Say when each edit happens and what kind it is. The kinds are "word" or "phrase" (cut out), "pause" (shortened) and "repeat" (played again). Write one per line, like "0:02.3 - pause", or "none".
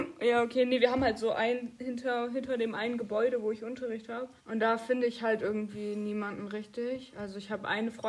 0:04.4 - pause